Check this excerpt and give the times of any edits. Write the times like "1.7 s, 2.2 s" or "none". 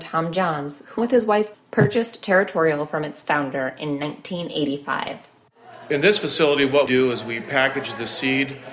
1.0 s, 1.5 s, 6.9 s